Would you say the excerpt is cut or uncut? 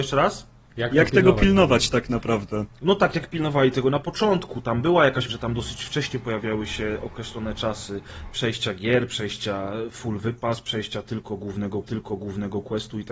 cut